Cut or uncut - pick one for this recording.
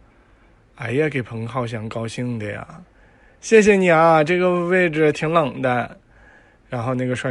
uncut